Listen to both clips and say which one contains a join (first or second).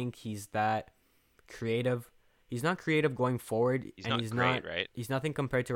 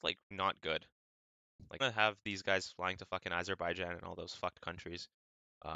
second